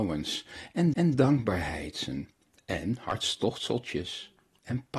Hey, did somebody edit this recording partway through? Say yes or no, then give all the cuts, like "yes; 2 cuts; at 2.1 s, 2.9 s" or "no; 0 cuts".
yes; 1 cut; at 0.9 s